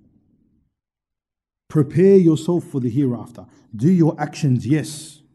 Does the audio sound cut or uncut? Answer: uncut